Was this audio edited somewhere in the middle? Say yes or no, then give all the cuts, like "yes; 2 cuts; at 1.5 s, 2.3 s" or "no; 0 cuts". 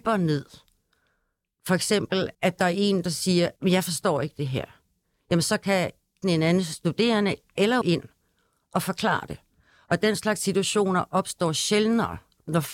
yes; 4 cuts; at 2.3 s, 3.6 s, 6.2 s, 7.8 s